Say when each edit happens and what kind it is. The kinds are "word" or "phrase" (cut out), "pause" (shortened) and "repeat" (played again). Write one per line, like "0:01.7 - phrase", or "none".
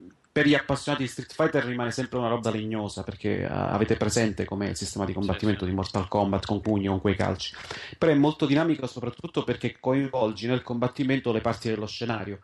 0:02.4 - word
0:06.6 - word